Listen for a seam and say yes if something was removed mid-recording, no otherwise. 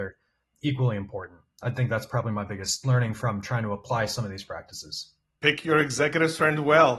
no